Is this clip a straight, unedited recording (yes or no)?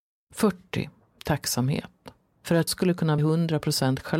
no